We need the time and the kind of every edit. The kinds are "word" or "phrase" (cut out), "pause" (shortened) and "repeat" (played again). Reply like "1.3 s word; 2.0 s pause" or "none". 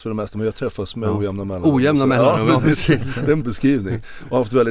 3.4 s word